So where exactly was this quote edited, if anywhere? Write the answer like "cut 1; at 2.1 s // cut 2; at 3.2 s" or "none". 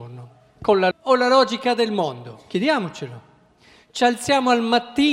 cut 1; at 0.9 s